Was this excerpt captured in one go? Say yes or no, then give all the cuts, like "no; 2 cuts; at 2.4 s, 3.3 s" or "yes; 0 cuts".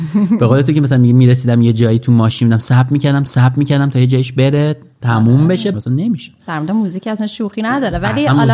no; 2 cuts; at 3.3 s, 5.7 s